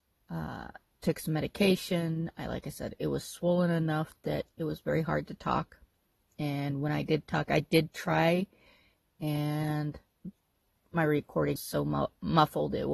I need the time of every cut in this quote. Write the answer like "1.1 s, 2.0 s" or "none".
11.6 s